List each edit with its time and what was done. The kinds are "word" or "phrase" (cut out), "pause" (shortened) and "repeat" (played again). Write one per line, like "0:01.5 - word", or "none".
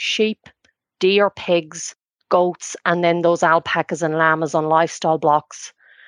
none